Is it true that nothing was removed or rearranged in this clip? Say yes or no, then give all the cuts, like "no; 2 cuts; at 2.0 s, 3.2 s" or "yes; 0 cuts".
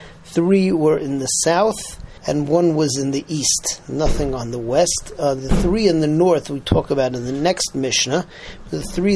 no; 1 cut; at 2.2 s